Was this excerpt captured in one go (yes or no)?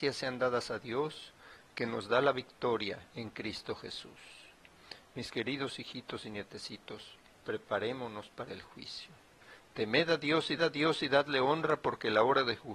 no